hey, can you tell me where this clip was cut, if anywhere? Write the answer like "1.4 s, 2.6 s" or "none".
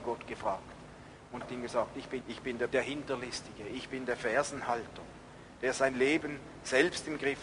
1.4 s, 2.2 s, 2.7 s